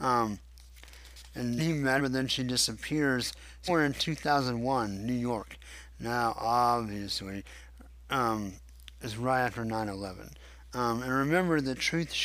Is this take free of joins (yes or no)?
no